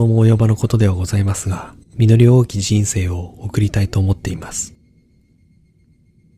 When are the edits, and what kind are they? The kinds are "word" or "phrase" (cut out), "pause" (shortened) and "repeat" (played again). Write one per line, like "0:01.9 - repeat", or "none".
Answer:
0:01.8 - pause